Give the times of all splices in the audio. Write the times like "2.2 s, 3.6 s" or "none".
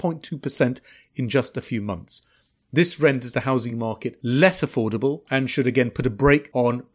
none